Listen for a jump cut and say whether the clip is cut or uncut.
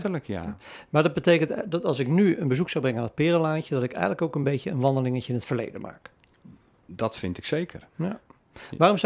uncut